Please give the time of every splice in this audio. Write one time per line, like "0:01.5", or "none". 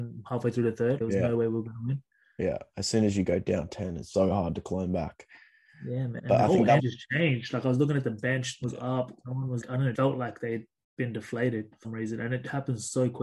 0:01.0
0:04.1
0:06.2
0:06.8
0:08.6
0:09.6
0:09.9
0:11.8